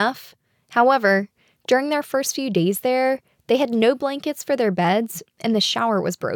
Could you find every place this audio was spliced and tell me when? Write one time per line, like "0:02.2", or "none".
none